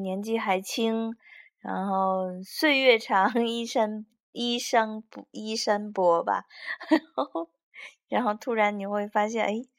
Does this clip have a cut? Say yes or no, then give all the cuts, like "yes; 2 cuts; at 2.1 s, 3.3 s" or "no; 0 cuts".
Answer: no; 0 cuts